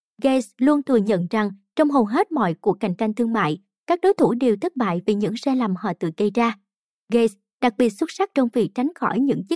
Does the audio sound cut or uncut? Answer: uncut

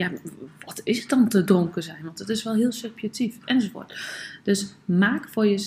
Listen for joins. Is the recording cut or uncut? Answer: uncut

